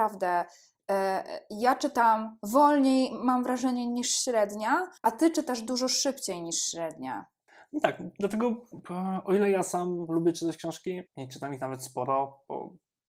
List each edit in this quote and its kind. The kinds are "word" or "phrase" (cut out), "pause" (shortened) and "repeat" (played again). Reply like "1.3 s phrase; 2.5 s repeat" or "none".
5.0 s pause; 7.5 s pause; 11.1 s pause